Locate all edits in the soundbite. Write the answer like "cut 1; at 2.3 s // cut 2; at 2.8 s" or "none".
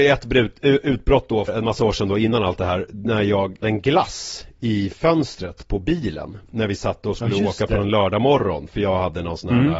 cut 1; at 1.5 s // cut 2; at 3.6 s // cut 3; at 7.8 s